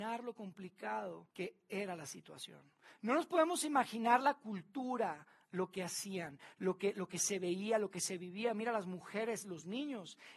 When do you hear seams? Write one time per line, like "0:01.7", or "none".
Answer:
0:01.3